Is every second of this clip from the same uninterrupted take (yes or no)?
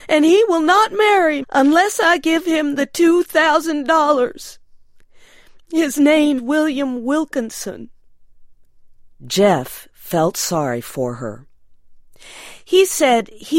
no